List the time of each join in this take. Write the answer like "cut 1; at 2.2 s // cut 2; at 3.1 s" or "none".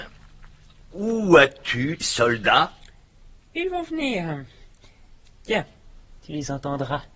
cut 1; at 2.0 s // cut 2; at 6.1 s